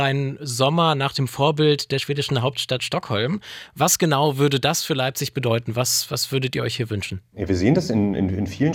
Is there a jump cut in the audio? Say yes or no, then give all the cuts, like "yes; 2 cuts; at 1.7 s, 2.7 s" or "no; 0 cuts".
no; 0 cuts